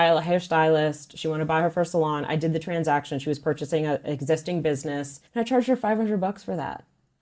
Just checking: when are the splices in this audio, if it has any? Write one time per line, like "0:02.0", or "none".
0:05.3

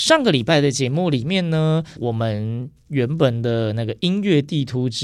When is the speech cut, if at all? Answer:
0:02.0

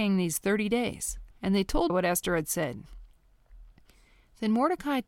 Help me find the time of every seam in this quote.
0:01.3
0:01.9

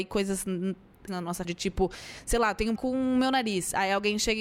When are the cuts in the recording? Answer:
0:01.1
0:01.4
0:02.8

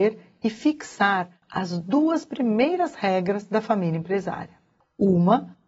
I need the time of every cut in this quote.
none

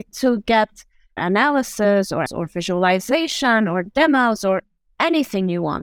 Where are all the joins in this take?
0:02.3

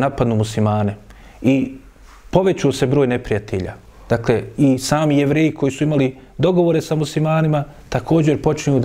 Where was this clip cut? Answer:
none

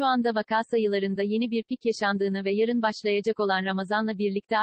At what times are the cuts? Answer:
none

